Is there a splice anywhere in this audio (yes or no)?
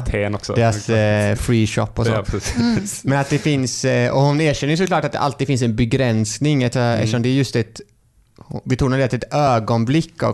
no